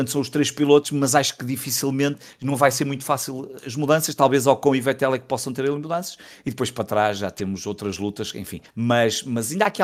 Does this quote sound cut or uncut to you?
cut